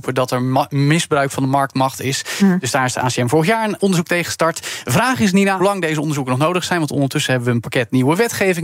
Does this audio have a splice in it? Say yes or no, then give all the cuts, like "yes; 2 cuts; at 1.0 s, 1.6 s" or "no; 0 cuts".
yes; 1 cut; at 5.6 s